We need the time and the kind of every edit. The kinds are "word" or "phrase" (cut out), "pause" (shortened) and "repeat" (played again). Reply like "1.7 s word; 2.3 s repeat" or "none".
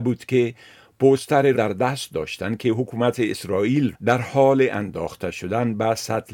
1.5 s word; 3.9 s word

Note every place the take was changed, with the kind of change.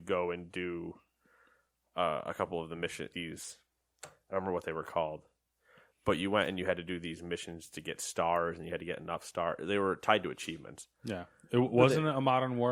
3.1 s word

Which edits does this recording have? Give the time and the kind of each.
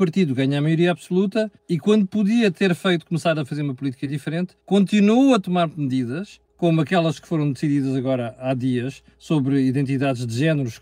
1.6 s pause; 4.6 s pause; 6.5 s pause; 9.1 s pause

